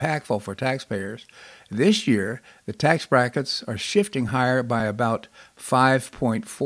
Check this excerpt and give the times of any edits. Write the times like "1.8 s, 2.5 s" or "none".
none